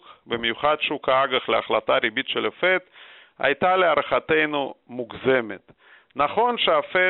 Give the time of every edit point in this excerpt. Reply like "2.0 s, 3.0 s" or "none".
none